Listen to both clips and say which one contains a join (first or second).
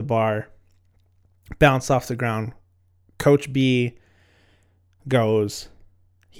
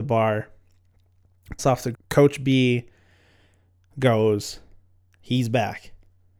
second